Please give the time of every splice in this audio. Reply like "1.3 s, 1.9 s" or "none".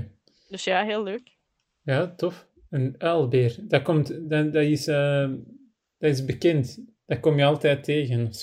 none